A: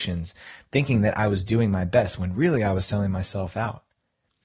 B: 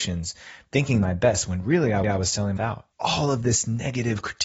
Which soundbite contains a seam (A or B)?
B